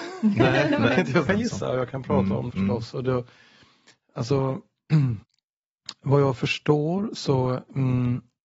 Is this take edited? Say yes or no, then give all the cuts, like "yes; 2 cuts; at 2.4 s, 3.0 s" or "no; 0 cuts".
yes; 3 cuts; at 1.3 s, 2.5 s, 5.2 s